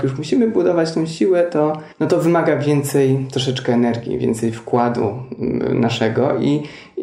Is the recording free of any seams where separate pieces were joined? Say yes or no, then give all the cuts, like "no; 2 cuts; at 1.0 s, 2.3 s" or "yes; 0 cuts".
no; 1 cut; at 1.9 s